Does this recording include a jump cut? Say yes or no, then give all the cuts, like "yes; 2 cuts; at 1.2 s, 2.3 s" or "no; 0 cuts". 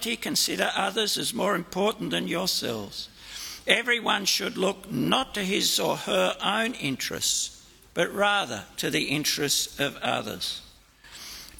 no; 0 cuts